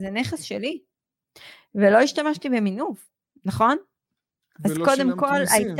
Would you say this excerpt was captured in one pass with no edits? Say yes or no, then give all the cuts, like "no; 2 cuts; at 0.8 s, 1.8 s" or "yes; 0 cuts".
yes; 0 cuts